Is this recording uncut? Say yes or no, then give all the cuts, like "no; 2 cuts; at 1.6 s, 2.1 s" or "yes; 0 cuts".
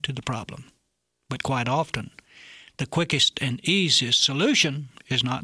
yes; 0 cuts